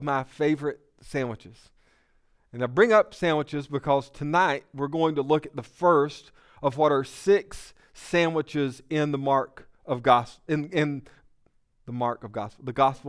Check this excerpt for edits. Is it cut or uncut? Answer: uncut